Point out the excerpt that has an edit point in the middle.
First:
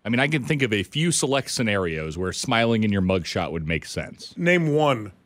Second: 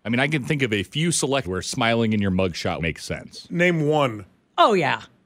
second; 2 cuts; at 1.4 s, 2.8 s

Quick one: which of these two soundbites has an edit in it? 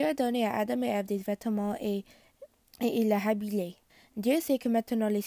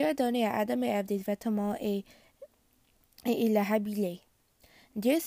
first; 2 cuts; at 2.6 s, 3.9 s

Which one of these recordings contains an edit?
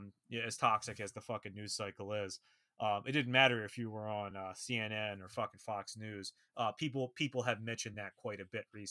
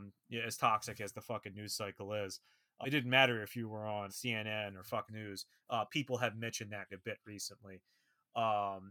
second; 5 cuts; at 2.8 s, 4.1 s, 5.1 s, 5.9 s, 6.9 s

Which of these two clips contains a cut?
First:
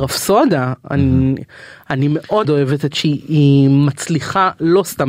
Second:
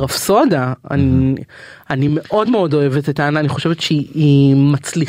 first; 2 cuts; at 2.4 s, 2.9 s

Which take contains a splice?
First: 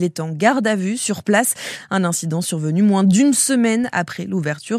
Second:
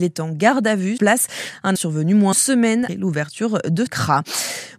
second; 5 cuts; at 1.0 s, 1.8 s, 2.3 s, 2.9 s, 3.9 s

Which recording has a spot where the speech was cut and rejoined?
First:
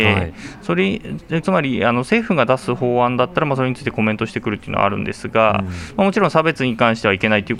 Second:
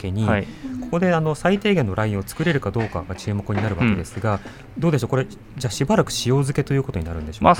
first; 1 cut; at 1.4 s

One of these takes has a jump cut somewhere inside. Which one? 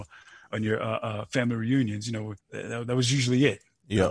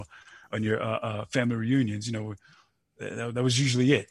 first; 1 cut; at 2.4 s

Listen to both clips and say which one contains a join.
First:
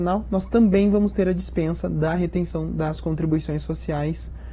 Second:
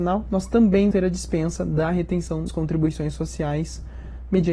second; 2 cuts; at 0.9 s, 2.5 s

